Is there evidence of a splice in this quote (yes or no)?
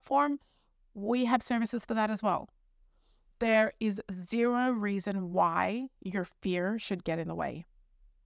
no